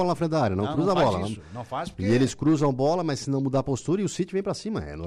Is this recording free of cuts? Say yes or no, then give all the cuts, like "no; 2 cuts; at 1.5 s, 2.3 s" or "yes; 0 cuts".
yes; 0 cuts